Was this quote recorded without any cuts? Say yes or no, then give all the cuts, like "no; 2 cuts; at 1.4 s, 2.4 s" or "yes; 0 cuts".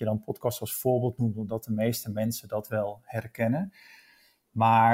yes; 0 cuts